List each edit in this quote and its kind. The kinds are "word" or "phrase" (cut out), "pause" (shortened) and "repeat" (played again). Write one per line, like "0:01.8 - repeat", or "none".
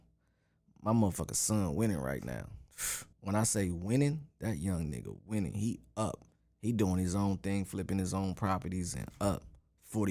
0:03.1 - pause
0:06.4 - pause

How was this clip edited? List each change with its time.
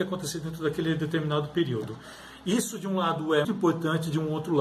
0:03.4 - word

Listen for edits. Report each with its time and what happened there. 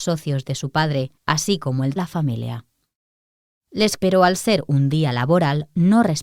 0:01.2 - pause
0:02.0 - phrase
0:04.0 - word

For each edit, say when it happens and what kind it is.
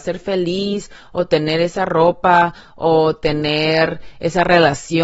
none

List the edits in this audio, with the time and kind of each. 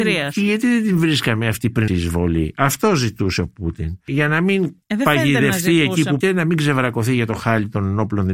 0:01.9 - word
0:04.8 - pause
0:06.2 - word

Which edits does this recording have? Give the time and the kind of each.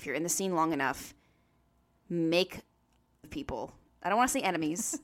0:03.2 - word

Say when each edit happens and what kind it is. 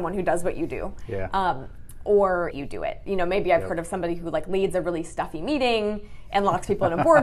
0:02.5 - phrase

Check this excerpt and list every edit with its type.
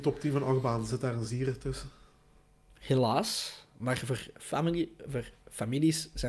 none

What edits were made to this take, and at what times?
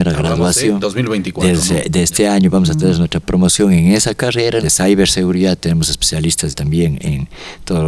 0:03.2 - word
0:04.6 - phrase
0:06.5 - word

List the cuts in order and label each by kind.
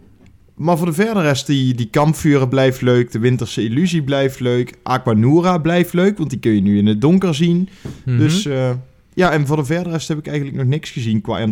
none

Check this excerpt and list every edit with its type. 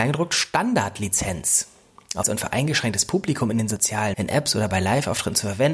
0:02.2 - word
0:04.1 - word

